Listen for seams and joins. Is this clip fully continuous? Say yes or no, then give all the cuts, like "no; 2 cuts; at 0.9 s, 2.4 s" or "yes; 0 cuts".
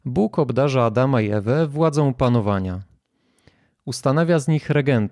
yes; 0 cuts